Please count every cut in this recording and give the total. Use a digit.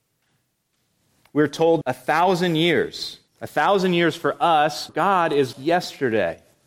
4